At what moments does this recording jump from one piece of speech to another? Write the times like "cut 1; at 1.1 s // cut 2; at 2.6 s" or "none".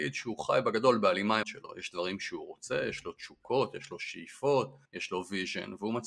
cut 1; at 1.4 s // cut 2; at 4.8 s

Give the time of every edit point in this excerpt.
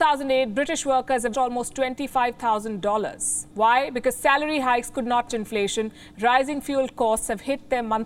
cut 1; at 1.3 s // cut 2; at 3.5 s // cut 3; at 5.3 s

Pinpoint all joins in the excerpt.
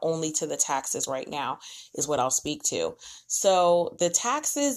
none

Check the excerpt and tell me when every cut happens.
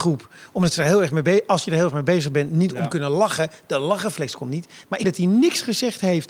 cut 1; at 5.0 s

